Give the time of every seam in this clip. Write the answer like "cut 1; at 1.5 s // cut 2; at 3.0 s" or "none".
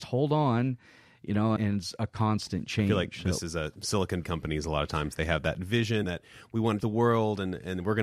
cut 1; at 1.6 s // cut 2; at 4.2 s // cut 3; at 6.0 s // cut 4; at 6.8 s